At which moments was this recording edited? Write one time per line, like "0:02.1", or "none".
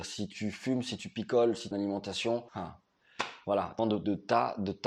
0:01.7
0:02.5
0:03.8